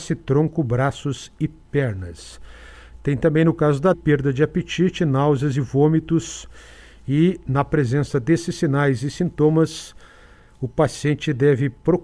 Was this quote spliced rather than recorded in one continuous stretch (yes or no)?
yes